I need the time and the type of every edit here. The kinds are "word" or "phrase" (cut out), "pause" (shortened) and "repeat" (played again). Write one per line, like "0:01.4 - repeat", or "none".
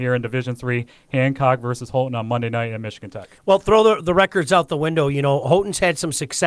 0:03.4 - pause